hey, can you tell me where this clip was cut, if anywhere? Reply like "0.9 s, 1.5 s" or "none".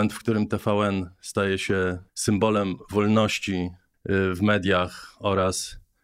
2.1 s, 3.9 s